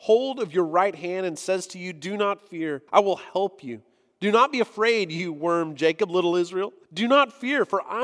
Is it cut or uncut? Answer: cut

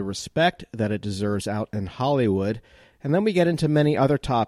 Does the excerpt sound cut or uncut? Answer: uncut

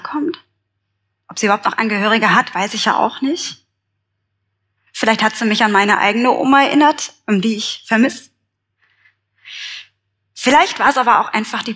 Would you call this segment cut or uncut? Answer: uncut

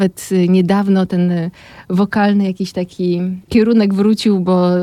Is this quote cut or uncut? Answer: uncut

